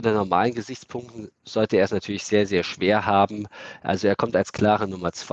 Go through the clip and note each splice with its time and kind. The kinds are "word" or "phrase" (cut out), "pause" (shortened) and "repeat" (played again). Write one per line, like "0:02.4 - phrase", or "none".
none